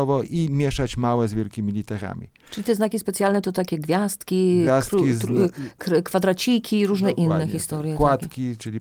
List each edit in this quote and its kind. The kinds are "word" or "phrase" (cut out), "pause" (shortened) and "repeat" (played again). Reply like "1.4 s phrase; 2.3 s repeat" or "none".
none